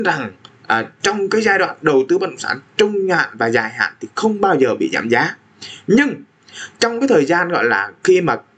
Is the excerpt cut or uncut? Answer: uncut